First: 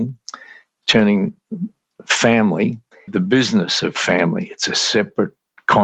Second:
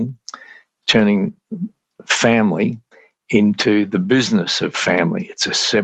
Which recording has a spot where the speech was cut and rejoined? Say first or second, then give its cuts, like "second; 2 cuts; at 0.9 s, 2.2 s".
first; 1 cut; at 3.1 s